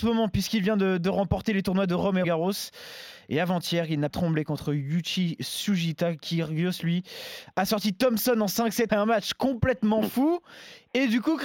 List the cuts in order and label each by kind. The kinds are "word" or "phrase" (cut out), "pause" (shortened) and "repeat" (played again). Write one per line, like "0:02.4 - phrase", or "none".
0:02.2 - word
0:04.1 - word
0:08.9 - word